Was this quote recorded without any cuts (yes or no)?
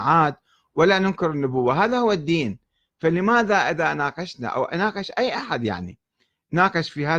yes